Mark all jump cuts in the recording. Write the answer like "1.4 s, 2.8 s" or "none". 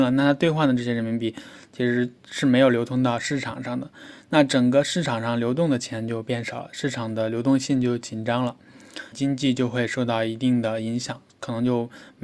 9.1 s